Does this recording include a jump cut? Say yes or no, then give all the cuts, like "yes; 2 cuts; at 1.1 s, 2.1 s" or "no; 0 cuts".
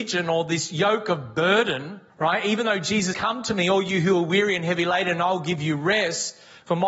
yes; 2 cuts; at 2.1 s, 3.1 s